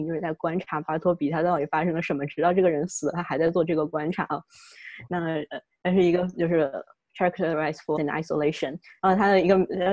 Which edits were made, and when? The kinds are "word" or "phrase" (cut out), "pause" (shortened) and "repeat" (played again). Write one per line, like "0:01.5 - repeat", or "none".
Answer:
0:08.0 - word